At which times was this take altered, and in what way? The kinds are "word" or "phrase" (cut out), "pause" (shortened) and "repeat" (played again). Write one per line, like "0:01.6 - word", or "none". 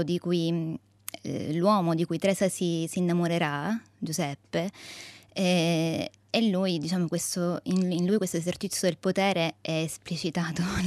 0:03.9 - pause